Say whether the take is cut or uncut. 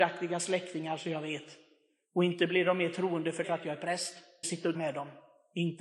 cut